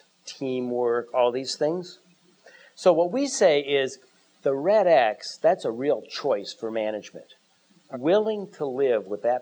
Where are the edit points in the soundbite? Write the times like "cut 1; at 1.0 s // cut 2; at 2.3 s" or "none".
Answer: cut 1; at 7.9 s